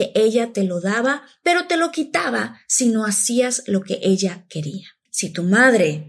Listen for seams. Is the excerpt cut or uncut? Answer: cut